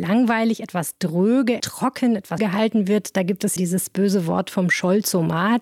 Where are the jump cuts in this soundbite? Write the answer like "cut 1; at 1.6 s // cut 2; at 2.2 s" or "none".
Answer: cut 1; at 1.6 s // cut 2; at 2.4 s // cut 3; at 3.6 s